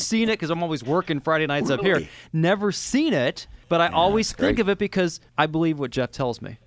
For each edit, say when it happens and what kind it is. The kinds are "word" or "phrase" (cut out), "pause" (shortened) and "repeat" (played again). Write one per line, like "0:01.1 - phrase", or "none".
0:03.6 - pause
0:05.3 - pause